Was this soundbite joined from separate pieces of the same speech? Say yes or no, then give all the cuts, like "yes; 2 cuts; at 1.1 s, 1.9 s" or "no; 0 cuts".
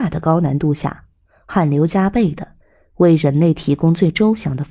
no; 0 cuts